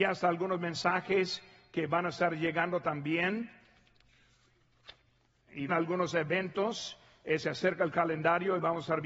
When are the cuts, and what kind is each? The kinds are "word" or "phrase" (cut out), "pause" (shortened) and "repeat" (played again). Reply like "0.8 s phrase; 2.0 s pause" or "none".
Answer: 5.7 s phrase